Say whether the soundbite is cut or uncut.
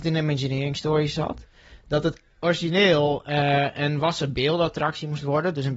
uncut